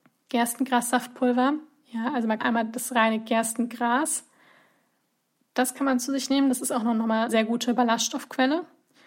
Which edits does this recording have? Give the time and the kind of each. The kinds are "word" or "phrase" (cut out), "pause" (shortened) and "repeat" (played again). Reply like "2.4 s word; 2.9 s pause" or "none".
2.4 s word; 7.3 s word